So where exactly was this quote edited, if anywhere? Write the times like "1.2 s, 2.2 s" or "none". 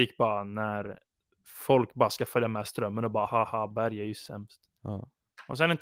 3.3 s, 4.8 s